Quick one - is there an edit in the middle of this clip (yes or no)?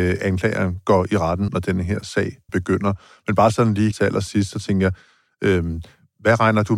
yes